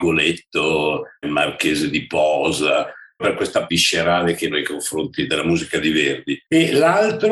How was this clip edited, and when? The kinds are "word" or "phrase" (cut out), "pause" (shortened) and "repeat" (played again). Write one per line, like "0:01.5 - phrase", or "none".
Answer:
0:01.2 - word
0:03.2 - word
0:03.7 - word
0:04.5 - word
0:05.3 - word